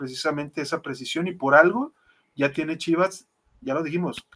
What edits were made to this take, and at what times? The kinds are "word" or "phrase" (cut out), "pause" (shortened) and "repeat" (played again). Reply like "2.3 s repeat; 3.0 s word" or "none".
none